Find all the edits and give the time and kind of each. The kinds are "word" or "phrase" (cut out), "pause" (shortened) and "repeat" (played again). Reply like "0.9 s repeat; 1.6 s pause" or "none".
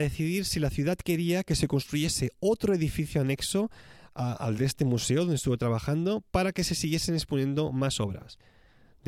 none